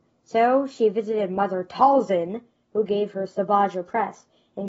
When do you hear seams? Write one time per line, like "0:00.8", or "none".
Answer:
none